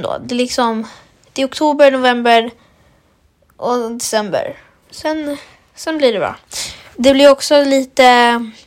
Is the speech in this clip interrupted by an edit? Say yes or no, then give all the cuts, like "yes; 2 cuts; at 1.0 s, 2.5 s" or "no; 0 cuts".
no; 0 cuts